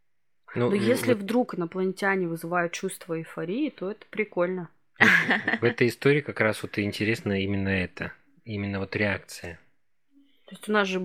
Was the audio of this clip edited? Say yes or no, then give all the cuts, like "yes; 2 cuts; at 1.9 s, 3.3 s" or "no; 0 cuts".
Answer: no; 0 cuts